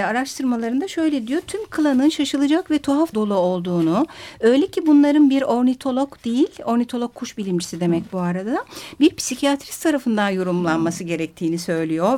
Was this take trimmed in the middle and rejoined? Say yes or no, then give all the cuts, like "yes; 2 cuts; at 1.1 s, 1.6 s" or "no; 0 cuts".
yes; 1 cut; at 3.1 s